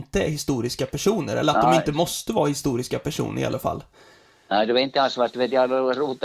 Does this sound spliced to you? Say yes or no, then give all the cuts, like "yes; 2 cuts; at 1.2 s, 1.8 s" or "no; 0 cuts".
no; 0 cuts